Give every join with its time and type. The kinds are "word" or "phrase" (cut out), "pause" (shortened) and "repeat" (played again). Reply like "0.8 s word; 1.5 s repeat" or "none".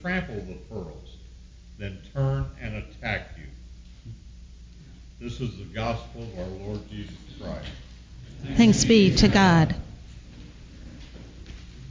none